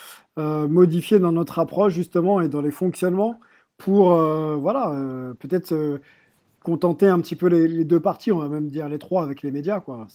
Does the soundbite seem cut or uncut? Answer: uncut